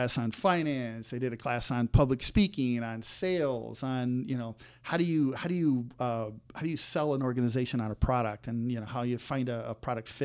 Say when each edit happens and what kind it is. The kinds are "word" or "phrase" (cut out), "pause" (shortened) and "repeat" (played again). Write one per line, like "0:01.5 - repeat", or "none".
none